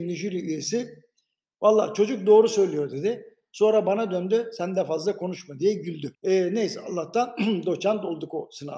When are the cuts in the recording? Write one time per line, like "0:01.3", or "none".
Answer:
0:06.1